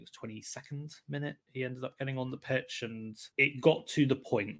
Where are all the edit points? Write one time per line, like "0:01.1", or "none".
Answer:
0:01.4
0:03.3